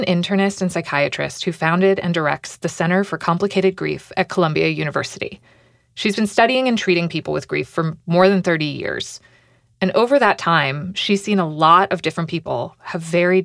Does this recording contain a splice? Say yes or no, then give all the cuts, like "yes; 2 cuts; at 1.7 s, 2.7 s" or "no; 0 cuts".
no; 0 cuts